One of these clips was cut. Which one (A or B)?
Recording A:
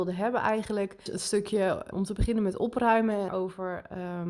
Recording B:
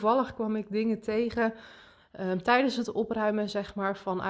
A